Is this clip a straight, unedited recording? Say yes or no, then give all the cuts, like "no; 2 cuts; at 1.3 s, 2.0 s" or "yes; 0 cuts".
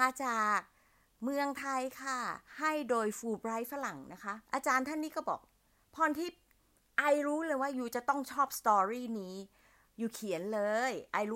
no; 2 cuts; at 2.5 s, 4.4 s